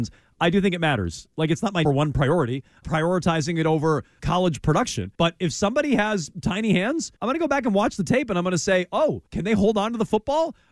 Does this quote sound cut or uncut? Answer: cut